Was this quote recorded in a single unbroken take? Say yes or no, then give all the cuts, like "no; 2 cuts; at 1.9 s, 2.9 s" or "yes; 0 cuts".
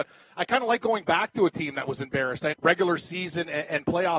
no; 1 cut; at 2.5 s